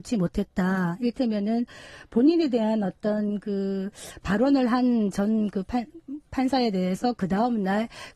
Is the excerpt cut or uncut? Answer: uncut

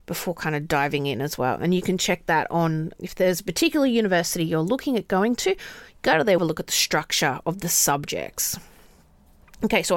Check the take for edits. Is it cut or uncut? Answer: cut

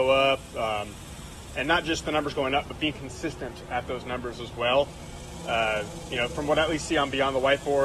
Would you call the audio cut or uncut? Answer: uncut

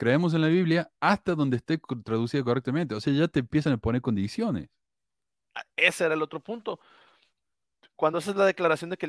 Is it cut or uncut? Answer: uncut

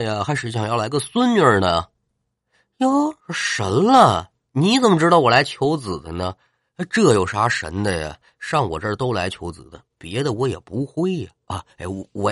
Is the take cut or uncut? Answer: cut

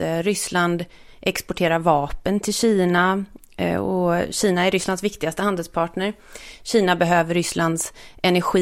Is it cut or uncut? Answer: uncut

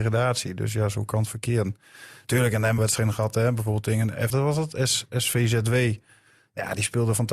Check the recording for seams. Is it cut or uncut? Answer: cut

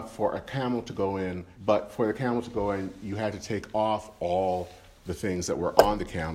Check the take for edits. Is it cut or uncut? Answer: cut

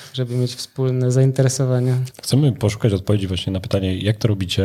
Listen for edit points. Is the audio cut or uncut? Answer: uncut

